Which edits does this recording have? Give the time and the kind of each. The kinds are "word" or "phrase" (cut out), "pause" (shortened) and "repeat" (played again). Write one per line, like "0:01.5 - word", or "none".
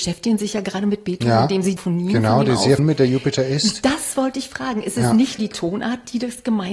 0:01.8 - word
0:02.8 - word
0:05.4 - word